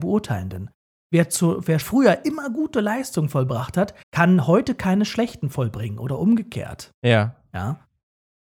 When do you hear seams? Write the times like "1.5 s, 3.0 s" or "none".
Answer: 1.8 s, 4.0 s